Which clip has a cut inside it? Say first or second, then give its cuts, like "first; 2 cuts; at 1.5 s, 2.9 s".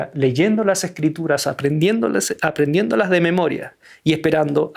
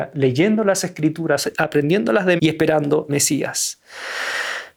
second; 3 cuts; at 1.4 s, 2.4 s, 3.1 s